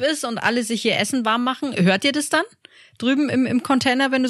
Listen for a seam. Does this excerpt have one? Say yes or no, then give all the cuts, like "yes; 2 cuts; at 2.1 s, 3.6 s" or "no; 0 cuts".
no; 0 cuts